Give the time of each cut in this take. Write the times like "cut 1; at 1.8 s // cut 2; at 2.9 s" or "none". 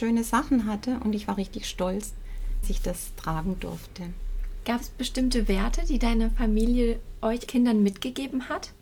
cut 1; at 2.6 s // cut 2; at 7.5 s